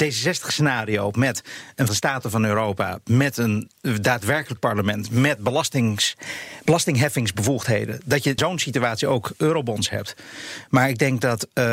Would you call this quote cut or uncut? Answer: cut